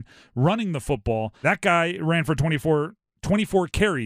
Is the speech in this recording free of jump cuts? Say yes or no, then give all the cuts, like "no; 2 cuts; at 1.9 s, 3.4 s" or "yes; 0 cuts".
no; 1 cut; at 1.4 s